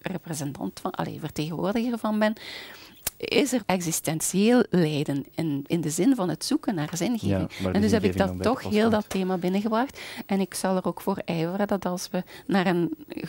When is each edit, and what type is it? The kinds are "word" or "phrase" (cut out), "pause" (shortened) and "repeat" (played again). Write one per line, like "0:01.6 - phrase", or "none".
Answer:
0:03.6 - word
0:05.7 - word